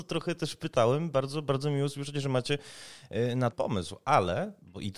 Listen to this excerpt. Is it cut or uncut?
cut